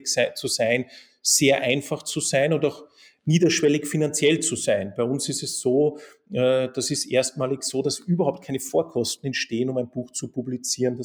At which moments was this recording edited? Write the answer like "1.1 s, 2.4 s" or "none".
none